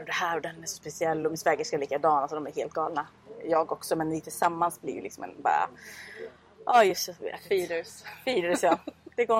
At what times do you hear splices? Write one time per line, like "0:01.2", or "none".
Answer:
none